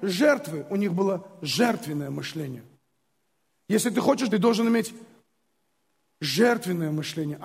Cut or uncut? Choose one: cut